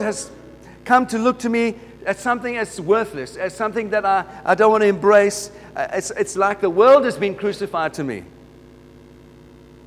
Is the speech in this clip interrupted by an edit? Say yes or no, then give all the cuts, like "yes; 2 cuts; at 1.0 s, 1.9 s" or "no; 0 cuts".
no; 0 cuts